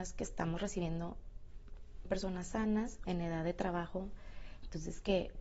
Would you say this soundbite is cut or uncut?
cut